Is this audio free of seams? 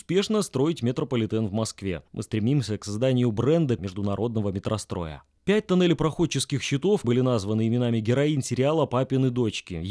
no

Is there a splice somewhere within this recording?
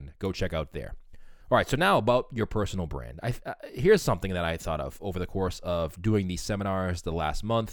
yes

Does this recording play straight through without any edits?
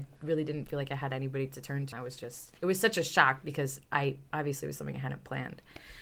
no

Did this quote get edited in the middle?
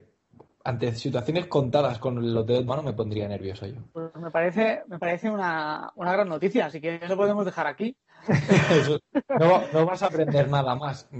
yes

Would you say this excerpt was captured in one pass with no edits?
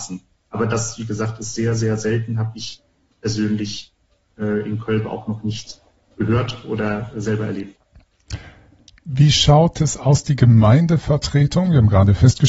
yes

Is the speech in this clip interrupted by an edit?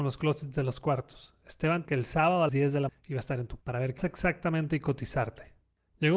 yes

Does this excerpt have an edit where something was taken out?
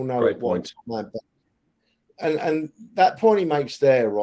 no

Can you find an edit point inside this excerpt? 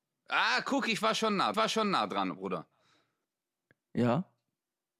yes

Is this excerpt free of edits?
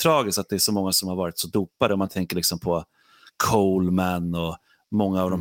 yes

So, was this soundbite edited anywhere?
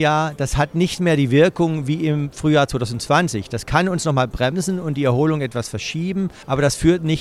no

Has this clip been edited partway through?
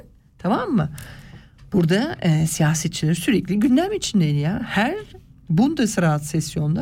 no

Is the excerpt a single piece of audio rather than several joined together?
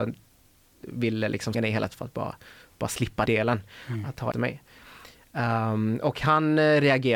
no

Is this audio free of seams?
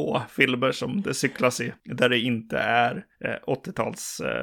yes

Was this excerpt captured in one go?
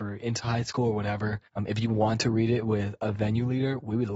no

